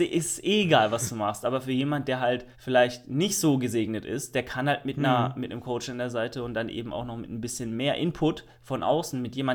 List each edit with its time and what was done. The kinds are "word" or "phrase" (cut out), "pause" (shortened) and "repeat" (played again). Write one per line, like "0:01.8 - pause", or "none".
0:02.5 - pause